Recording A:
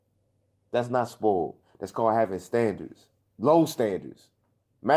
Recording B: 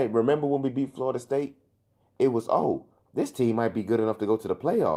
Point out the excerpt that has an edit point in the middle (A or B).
A